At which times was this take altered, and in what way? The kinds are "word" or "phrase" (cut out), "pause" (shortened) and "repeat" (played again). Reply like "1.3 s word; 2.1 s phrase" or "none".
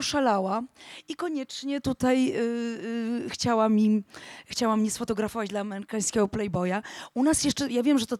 none